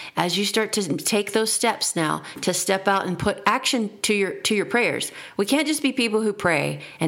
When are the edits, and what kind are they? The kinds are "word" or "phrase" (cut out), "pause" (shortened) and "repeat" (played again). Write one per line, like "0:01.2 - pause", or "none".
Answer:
none

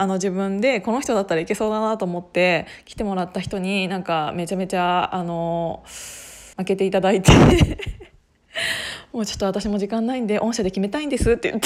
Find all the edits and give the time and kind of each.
0:06.5 - pause

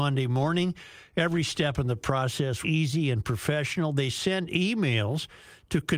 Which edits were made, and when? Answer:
0:02.6 - word

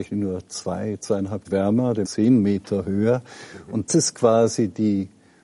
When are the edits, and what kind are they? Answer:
0:01.4 - word
0:02.0 - word
0:03.9 - word

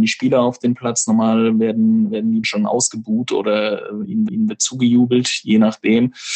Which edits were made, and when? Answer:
0:02.4 - phrase
0:04.3 - repeat

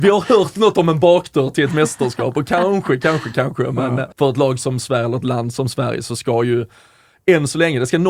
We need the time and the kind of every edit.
0:04.1 - pause

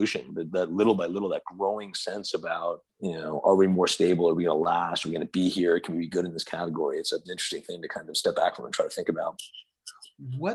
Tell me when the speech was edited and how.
0:02.9 - pause
0:07.2 - word

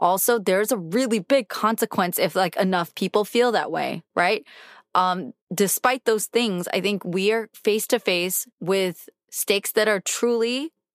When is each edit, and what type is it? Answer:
0:04.1 - pause
0:05.4 - pause
0:08.5 - pause

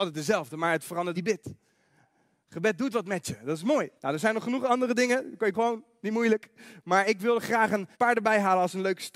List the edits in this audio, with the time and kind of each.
0:01.1 - phrase
0:04.0 - pause
0:05.5 - word
0:07.9 - pause

